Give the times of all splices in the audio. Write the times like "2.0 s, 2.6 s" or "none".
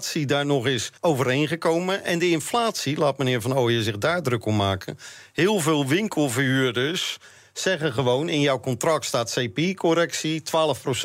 1.0 s